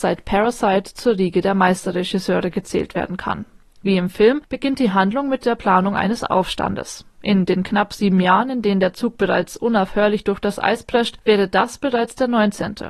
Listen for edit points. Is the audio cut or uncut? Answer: uncut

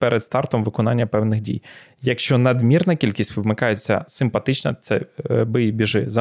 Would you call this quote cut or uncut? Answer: uncut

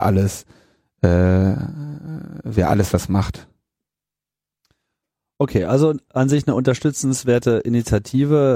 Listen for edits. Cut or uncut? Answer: uncut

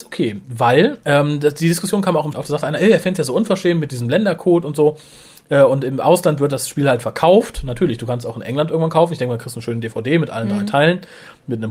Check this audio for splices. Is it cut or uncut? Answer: cut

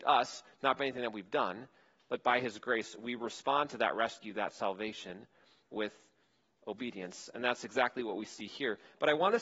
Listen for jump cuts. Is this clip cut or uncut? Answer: uncut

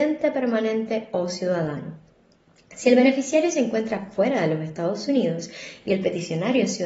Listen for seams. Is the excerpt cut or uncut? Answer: uncut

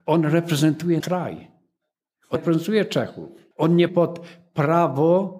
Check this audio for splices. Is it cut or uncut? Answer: cut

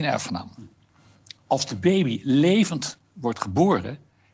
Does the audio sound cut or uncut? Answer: uncut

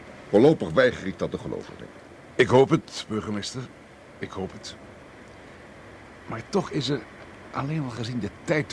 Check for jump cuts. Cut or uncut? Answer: uncut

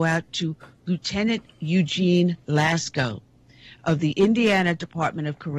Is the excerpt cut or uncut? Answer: cut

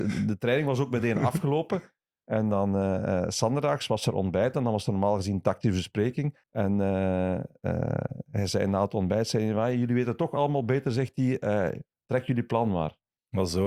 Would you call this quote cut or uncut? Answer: cut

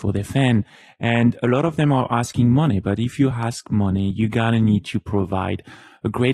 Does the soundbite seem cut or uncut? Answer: uncut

